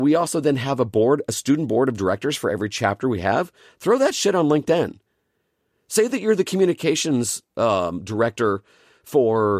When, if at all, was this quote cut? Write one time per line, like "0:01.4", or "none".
none